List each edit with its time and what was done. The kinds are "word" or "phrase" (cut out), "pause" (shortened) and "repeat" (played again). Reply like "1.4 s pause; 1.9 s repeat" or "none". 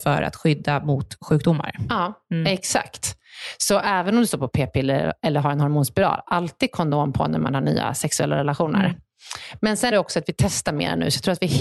9.9 s word

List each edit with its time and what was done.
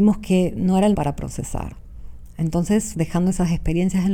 0.9 s word; 2.9 s word

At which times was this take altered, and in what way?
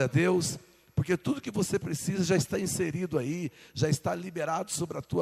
none

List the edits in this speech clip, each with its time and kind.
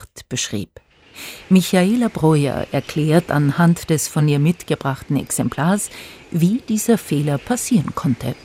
none

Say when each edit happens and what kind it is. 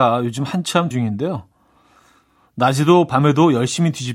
0.9 s word

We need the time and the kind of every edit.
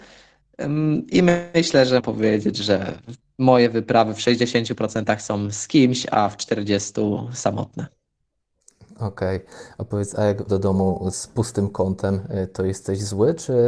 2.0 s word; 10.5 s word; 11.1 s word

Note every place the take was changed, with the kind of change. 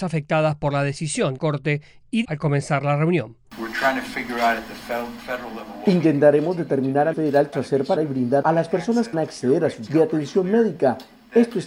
1.4 s word; 2.2 s word; 7.1 s word; 7.5 s word; 8.0 s word; 8.4 s word; 9.1 s word; 9.9 s word

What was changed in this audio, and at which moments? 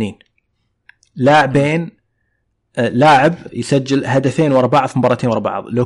3.5 s word

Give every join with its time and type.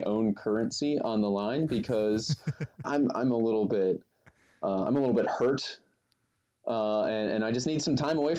2.8 s word

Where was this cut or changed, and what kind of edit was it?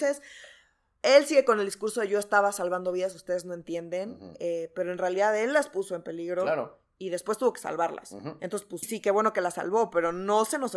8.8 s word

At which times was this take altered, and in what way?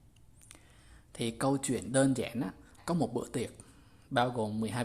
2.8 s word

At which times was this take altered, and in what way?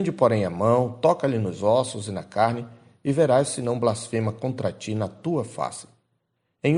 none

